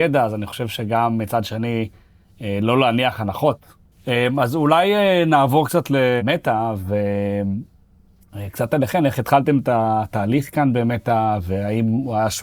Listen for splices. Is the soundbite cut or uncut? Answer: uncut